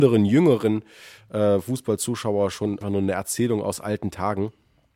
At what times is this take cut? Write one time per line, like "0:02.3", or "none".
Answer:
0:02.8